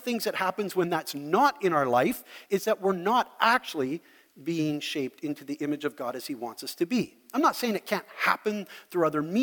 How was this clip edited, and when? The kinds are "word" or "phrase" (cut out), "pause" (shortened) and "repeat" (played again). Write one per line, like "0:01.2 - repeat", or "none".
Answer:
none